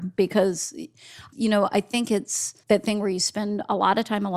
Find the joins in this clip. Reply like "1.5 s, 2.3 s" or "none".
1.3 s, 2.6 s